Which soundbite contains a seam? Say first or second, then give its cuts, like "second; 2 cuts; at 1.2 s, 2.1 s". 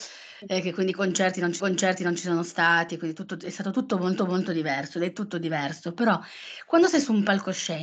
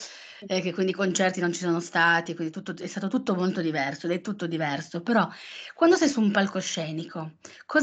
first; 2 cuts; at 1.6 s, 4.2 s